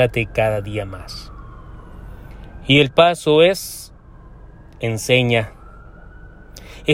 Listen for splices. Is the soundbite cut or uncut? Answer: cut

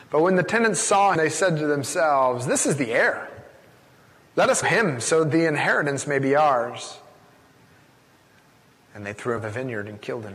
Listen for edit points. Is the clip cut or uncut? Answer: cut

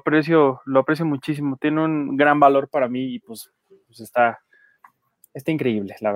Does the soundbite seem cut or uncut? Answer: uncut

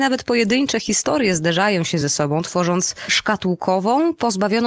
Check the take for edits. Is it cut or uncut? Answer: uncut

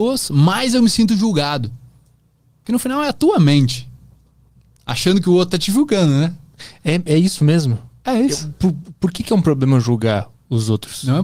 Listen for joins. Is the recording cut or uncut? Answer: uncut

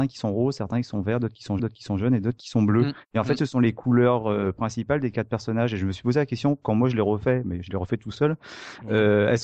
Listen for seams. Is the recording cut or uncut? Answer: cut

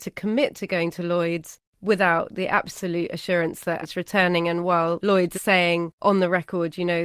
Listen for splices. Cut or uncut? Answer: cut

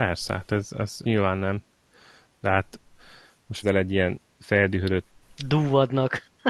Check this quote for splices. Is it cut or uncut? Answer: cut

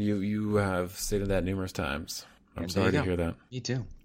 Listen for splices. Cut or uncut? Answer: uncut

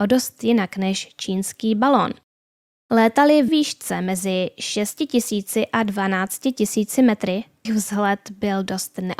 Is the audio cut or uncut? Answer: cut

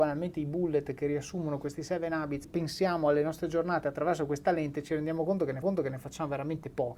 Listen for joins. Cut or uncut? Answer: cut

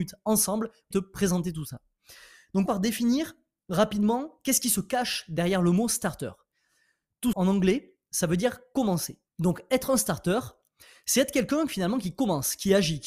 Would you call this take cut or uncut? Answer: cut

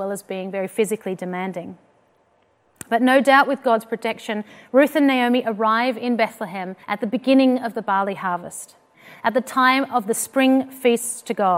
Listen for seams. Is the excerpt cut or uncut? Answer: cut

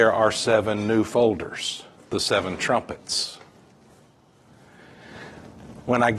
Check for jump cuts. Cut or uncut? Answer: cut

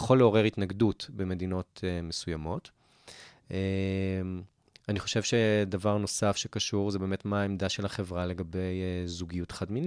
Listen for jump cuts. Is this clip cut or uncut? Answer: uncut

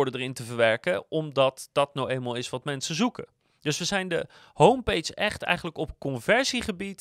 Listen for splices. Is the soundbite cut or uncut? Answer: uncut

